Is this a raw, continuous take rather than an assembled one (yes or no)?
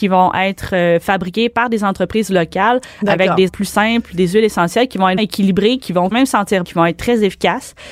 no